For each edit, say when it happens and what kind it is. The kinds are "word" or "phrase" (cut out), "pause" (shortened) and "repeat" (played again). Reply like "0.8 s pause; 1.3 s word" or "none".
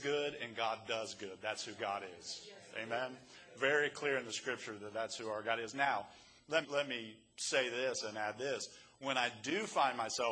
6.6 s word